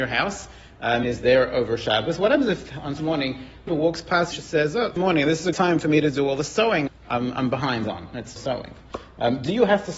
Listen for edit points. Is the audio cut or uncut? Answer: cut